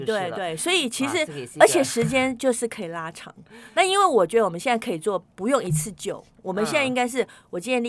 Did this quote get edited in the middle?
no; 0 cuts

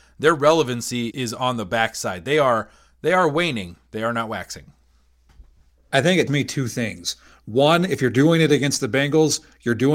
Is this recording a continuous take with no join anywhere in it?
no; 2 cuts; at 1.1 s, 6.3 s

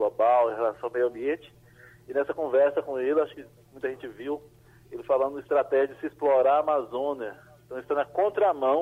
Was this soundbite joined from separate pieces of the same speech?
no; 0 cuts

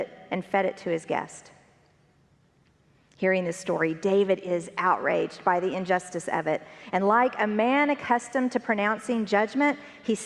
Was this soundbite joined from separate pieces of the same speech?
no; 0 cuts

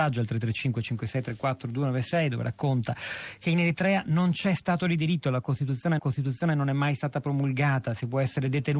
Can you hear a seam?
yes; 1 cut; at 6.0 s

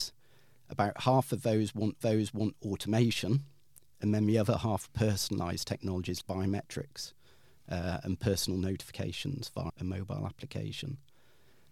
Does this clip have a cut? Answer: yes; 4 cuts; at 2.0 s, 4.9 s, 6.2 s, 9.7 s

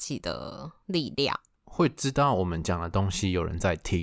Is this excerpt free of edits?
yes; 0 cuts

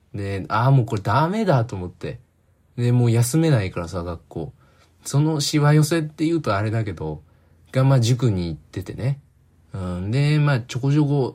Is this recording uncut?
yes; 0 cuts

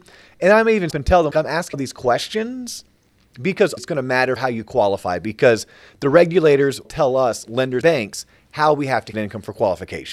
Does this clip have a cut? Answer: yes; 8 cuts; at 0.9 s, 1.3 s, 1.7 s, 3.8 s, 4.4 s, 6.8 s, 7.8 s, 9.1 s

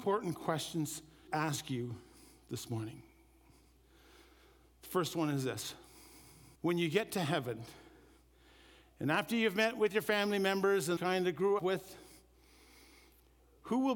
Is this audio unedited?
no; 4 cuts; at 1.3 s, 6.6 s, 11.0 s, 11.6 s

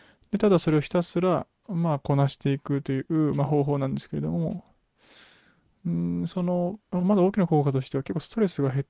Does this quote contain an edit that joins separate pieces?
yes; 2 cuts; at 1.6 s, 6.8 s

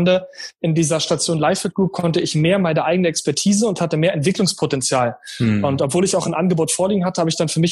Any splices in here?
no; 0 cuts

